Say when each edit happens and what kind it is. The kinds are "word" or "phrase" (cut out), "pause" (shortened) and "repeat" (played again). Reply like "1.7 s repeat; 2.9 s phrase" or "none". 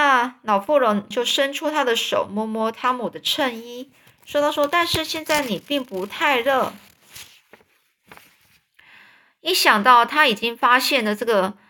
1.1 s phrase